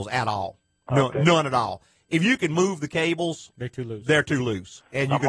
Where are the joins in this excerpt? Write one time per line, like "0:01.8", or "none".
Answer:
none